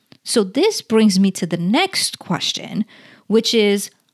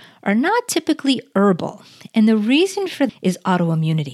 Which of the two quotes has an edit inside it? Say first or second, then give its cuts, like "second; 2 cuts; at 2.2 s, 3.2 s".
second; 1 cut; at 3.1 s